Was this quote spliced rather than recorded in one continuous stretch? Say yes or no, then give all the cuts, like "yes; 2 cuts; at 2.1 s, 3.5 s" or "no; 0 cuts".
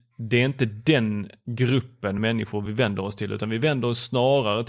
no; 0 cuts